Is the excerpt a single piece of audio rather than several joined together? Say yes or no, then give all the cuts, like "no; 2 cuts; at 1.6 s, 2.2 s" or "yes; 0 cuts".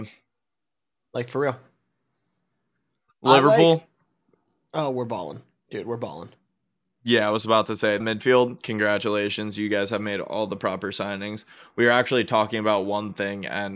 no; 1 cut; at 8.0 s